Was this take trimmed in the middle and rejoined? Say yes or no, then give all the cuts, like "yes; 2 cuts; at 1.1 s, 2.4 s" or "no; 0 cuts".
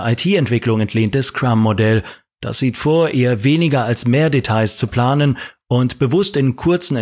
no; 0 cuts